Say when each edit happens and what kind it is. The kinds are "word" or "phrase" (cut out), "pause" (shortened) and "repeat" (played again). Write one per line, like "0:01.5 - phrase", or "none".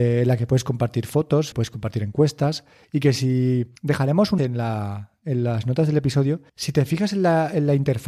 0:01.5 - word
0:03.8 - pause
0:04.4 - word
0:06.5 - pause